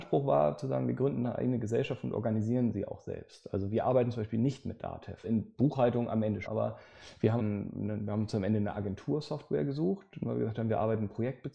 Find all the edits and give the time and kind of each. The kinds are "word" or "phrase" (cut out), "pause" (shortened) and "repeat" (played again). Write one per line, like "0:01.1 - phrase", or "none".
0:05.2 - word
0:06.4 - word
0:07.4 - word